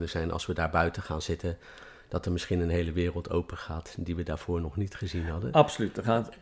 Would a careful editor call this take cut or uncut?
uncut